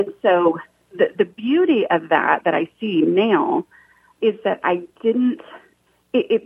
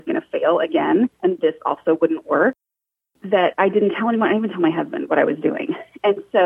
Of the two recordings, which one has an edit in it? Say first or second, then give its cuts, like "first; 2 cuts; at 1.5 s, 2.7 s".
second; 1 cut; at 1.1 s